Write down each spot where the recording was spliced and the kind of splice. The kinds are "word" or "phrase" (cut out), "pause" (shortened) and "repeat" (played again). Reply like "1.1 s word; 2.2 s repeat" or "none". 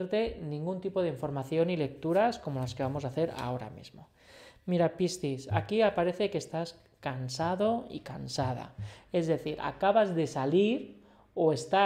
none